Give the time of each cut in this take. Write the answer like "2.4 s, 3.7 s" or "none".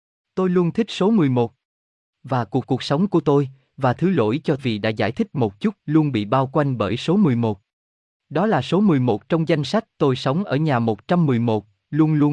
2.6 s, 4.6 s, 5.8 s, 9.9 s